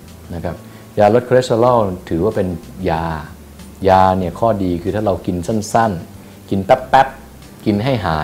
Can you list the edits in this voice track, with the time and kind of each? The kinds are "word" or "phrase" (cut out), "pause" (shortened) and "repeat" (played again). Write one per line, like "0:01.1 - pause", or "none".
none